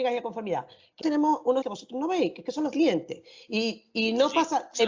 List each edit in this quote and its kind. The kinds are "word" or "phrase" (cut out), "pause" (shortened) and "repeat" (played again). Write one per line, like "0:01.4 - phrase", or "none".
0:01.0 - word
0:01.6 - word
0:02.7 - word